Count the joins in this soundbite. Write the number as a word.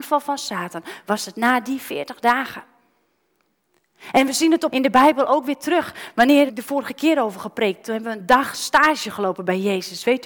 two